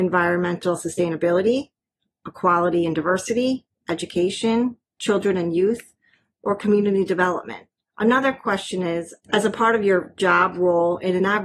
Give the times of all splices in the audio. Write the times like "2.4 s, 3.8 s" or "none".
none